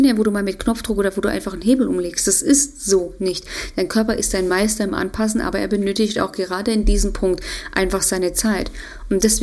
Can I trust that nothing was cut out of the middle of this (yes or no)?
yes